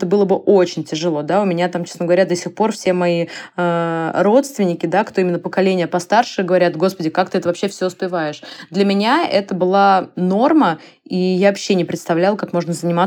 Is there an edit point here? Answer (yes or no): no